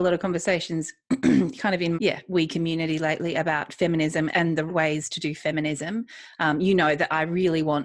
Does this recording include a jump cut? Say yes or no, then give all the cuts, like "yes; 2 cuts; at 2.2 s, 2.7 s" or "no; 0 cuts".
yes; 3 cuts; at 1.9 s, 4.3 s, 4.7 s